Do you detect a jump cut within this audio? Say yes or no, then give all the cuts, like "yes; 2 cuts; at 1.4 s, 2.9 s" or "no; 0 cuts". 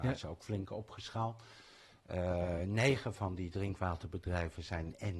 no; 0 cuts